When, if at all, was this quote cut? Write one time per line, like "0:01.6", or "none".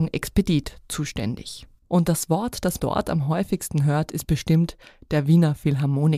0:02.8